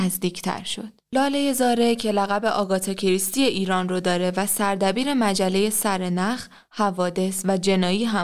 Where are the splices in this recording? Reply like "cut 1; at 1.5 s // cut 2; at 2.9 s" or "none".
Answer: cut 1; at 1.0 s